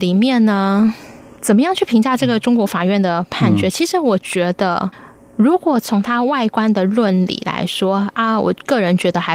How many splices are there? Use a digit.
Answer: 0